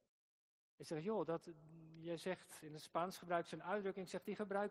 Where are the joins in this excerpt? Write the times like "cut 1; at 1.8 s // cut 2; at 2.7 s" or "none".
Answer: none